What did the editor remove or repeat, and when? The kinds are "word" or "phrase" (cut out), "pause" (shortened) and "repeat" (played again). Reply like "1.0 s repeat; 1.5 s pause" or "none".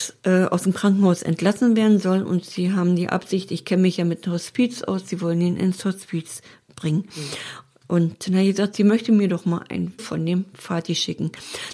10.0 s word